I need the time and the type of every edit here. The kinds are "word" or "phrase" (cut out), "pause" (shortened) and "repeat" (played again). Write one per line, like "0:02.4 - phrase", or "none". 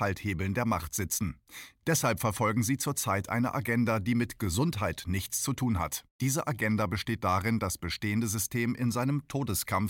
0:06.1 - pause